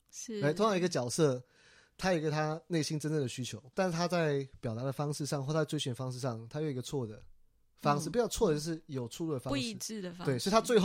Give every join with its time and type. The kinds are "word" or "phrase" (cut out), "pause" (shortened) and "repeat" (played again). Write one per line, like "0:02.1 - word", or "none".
0:03.7 - word